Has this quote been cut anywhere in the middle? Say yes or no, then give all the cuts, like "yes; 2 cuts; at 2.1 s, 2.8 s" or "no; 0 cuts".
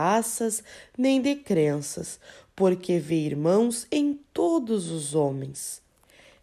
no; 0 cuts